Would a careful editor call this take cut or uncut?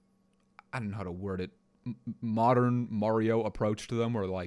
uncut